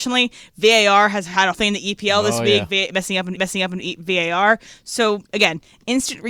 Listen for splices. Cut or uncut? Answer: cut